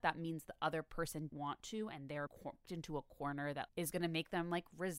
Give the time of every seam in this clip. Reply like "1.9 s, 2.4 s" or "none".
1.3 s, 2.3 s, 2.6 s, 3.7 s